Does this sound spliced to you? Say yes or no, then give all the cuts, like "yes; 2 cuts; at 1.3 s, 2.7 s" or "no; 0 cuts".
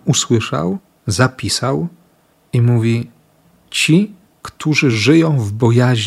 no; 0 cuts